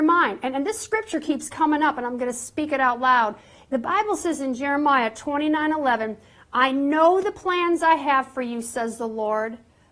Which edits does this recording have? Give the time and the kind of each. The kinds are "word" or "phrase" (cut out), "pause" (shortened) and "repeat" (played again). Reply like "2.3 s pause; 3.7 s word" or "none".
none